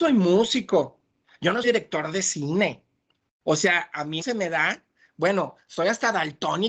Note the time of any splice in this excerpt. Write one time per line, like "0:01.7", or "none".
0:01.6
0:04.2